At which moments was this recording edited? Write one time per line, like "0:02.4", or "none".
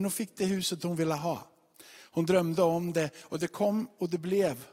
none